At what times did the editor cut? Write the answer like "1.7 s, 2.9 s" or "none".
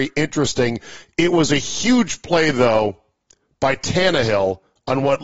none